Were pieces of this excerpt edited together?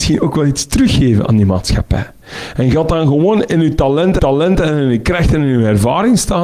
yes; 1 cut; at 4.2 s

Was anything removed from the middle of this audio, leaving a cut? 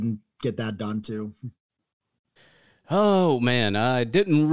no; 0 cuts

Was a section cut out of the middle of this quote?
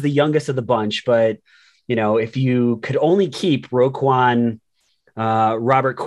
no; 0 cuts

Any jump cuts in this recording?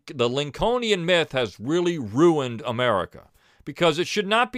no; 0 cuts

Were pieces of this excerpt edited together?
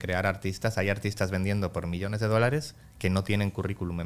no; 0 cuts

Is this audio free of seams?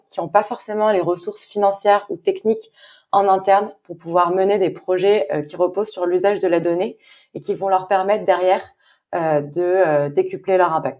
yes; 0 cuts

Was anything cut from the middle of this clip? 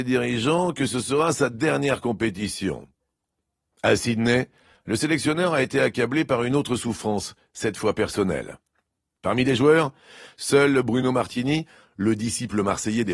no; 0 cuts

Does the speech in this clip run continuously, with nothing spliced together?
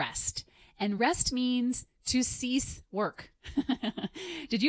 yes; 0 cuts

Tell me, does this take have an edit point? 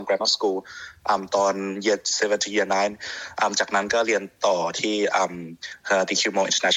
no; 0 cuts

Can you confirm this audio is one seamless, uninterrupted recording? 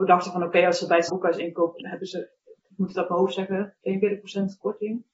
no; 3 cuts; at 1.1 s, 1.8 s, 2.6 s

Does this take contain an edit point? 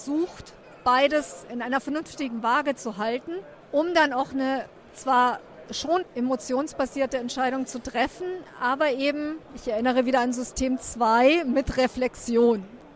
no; 0 cuts

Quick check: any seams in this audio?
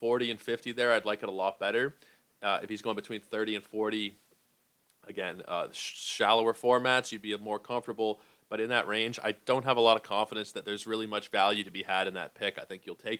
no; 0 cuts

